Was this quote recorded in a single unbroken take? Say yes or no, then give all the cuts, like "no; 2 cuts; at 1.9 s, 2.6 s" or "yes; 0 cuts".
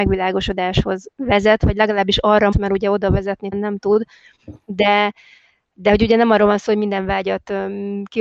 no; 3 cuts; at 2.5 s, 3.5 s, 4.6 s